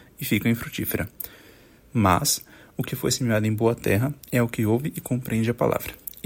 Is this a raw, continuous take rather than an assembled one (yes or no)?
yes